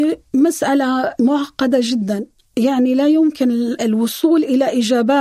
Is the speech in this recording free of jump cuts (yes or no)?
yes